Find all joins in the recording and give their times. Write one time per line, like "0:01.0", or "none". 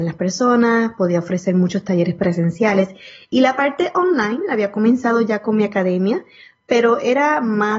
none